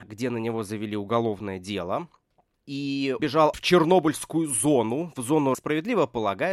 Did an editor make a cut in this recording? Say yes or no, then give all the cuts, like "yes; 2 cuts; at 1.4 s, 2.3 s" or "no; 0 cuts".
yes; 3 cuts; at 3.2 s, 3.5 s, 5.5 s